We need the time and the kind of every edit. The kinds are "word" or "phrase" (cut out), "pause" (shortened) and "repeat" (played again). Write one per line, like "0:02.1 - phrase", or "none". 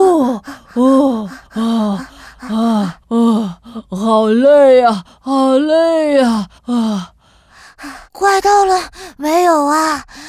0:01.5 - pause
0:03.0 - pause
0:06.6 - pause
0:08.1 - pause